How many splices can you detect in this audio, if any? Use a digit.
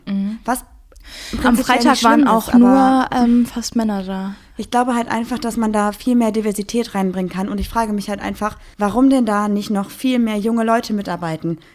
1